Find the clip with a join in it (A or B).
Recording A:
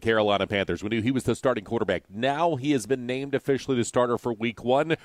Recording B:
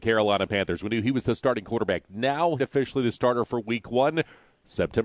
B